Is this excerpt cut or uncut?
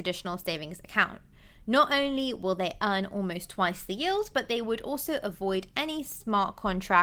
uncut